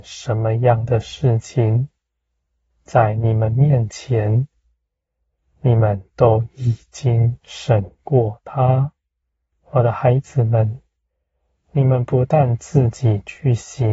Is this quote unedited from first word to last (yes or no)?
no